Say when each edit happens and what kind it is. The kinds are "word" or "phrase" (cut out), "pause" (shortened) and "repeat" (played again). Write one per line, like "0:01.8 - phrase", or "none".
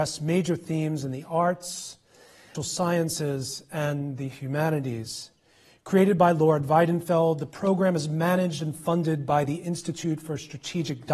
0:02.5 - word